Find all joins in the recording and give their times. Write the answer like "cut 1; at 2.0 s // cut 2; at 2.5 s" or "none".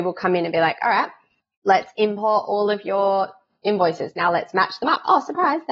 none

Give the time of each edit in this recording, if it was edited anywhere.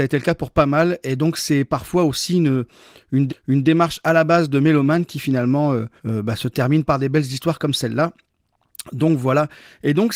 cut 1; at 3.3 s // cut 2; at 6.0 s // cut 3; at 6.9 s

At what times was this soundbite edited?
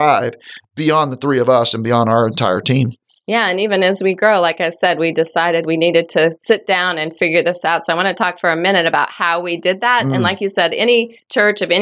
none

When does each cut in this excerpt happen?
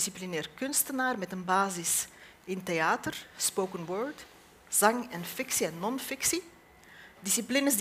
none

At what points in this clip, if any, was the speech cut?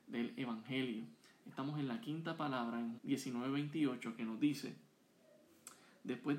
cut 1; at 2.9 s

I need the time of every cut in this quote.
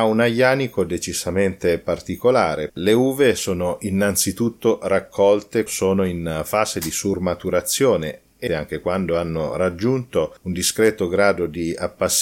cut 1; at 2.7 s // cut 2; at 5.7 s // cut 3; at 8.5 s

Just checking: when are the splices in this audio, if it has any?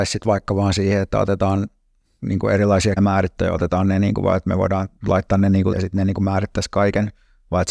cut 1; at 3.0 s // cut 2; at 5.0 s // cut 3; at 5.7 s

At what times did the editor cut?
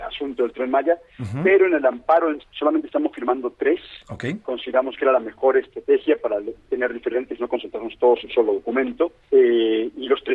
cut 1; at 2.4 s // cut 2; at 6.6 s // cut 3; at 7.4 s // cut 4; at 8.2 s // cut 5; at 9.2 s

